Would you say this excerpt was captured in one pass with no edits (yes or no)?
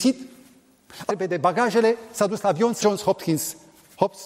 no